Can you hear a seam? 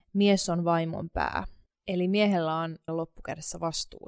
yes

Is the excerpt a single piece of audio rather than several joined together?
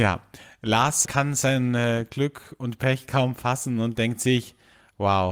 no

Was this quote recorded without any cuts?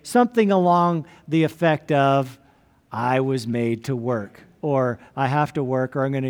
yes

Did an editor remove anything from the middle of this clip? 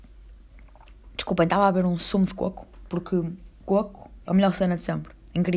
yes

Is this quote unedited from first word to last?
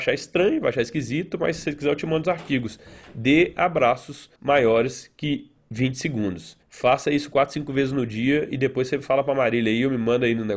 no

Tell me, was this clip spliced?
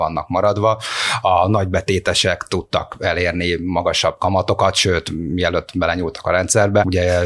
no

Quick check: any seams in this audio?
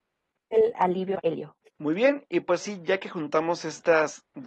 yes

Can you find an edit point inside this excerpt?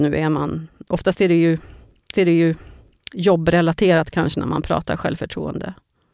yes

